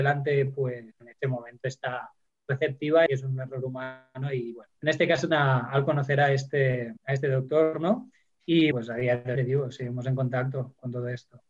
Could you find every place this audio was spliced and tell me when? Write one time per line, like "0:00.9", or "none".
0:00.9
0:03.1
0:04.8
0:05.3
0:07.0
0:08.7
0:09.4